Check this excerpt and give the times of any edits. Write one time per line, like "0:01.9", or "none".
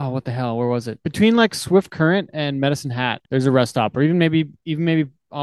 0:01.0
0:03.3